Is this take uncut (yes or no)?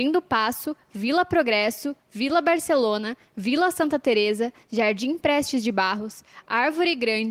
yes